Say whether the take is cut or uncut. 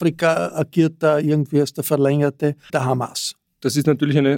cut